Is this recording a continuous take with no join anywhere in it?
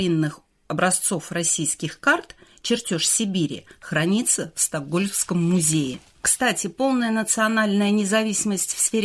yes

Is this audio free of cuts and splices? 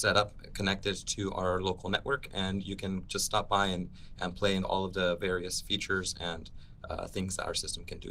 no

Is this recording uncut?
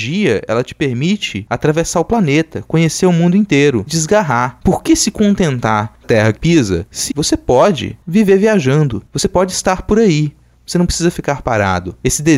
no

